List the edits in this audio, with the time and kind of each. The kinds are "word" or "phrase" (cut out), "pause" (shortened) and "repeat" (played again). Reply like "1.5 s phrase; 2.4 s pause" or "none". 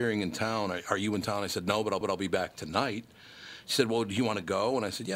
2.0 s repeat